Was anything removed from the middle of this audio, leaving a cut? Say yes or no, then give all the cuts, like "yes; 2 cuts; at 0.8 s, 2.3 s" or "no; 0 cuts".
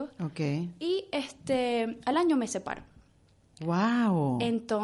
no; 0 cuts